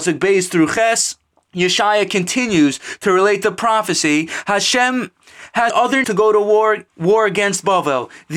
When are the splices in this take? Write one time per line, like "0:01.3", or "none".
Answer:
0:01.3
0:05.7
0:06.0
0:06.9